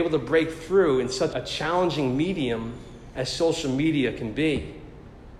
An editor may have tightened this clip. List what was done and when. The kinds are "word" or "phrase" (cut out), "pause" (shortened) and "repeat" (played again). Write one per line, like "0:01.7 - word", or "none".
0:01.3 - word